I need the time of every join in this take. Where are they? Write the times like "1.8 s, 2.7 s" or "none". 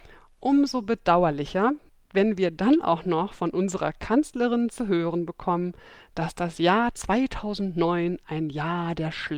1.9 s

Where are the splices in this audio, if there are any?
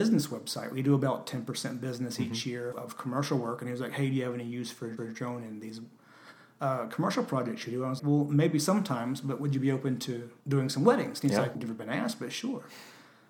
2.7 s, 5.0 s, 8.0 s, 10.4 s, 11.5 s

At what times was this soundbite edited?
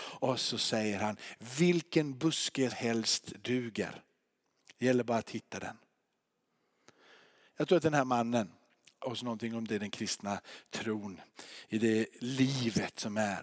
2.7 s, 9.0 s, 9.7 s

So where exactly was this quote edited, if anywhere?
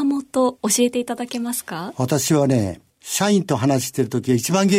2.9 s

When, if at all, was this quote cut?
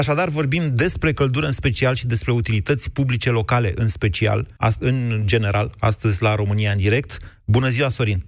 4.6 s

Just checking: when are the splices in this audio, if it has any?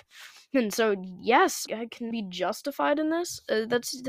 1.7 s, 2.1 s

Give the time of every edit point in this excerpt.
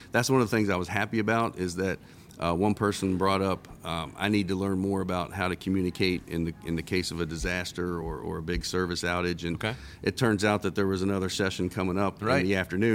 none

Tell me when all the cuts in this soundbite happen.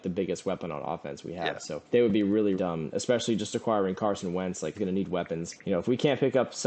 1.8 s, 2.5 s, 4.7 s, 5.6 s

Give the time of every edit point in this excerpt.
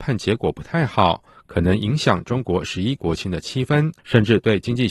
4.0 s

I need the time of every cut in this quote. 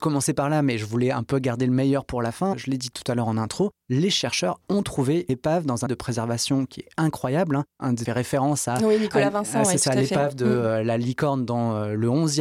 5.3 s, 5.9 s, 8.1 s

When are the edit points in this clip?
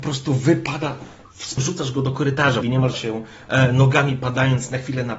1.6 s, 2.6 s, 2.9 s

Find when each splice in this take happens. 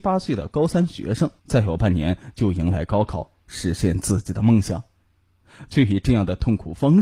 1.4 s

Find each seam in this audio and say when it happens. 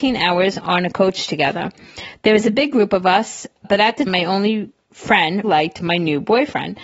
3.6 s, 4.1 s, 5.4 s

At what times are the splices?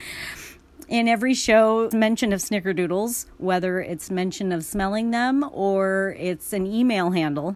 1.9 s

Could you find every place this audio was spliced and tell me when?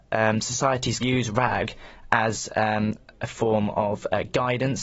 1.0 s

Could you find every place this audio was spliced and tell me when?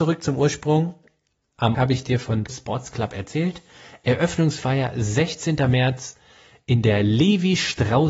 1.7 s, 2.5 s

